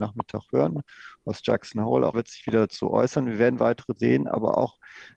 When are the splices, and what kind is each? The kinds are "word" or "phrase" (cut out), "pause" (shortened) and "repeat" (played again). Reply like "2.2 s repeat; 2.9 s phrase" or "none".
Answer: 2.1 s word; 4.0 s word